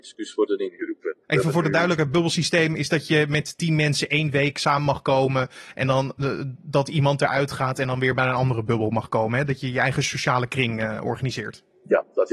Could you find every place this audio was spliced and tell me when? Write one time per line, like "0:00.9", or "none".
0:01.2